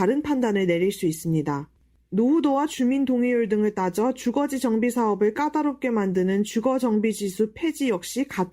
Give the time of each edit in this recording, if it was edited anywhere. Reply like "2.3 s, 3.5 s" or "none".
none